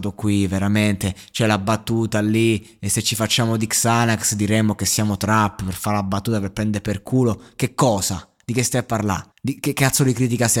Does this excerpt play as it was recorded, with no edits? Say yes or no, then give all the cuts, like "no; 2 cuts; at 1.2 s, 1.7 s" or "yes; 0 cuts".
no; 1 cut; at 9.3 s